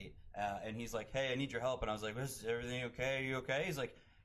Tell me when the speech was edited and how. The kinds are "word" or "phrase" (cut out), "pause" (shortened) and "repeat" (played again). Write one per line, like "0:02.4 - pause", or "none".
none